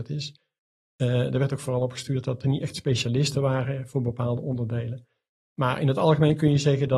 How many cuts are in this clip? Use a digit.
0